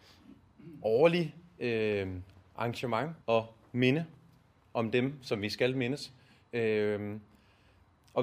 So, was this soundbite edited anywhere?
yes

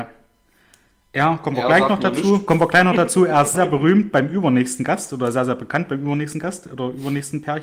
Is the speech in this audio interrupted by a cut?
yes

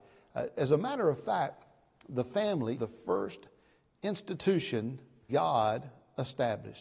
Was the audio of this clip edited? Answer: yes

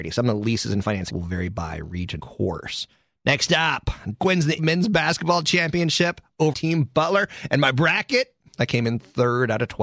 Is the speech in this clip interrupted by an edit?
yes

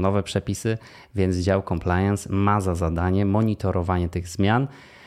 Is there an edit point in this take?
no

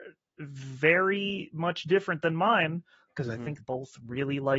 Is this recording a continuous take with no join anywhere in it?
no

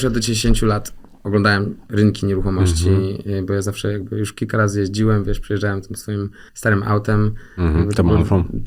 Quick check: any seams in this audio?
yes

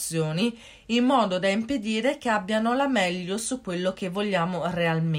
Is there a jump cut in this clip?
no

